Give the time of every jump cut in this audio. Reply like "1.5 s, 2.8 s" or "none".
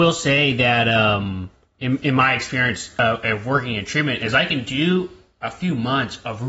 none